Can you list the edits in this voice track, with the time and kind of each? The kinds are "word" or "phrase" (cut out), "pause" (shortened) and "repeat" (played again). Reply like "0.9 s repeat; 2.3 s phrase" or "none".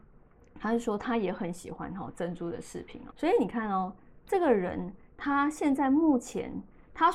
3.1 s word